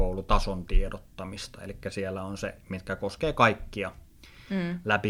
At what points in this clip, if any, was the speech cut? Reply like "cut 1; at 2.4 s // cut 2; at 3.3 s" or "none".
none